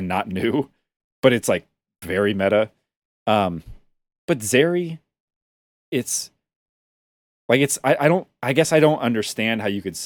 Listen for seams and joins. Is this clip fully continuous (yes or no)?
yes